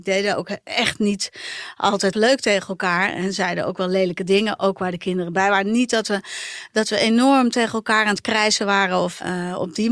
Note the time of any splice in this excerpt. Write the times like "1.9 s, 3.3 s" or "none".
2.1 s